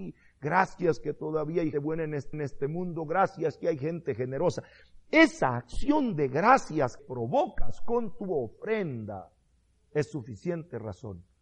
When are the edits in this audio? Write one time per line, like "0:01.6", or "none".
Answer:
0:01.7
0:02.3
0:07.0
0:09.5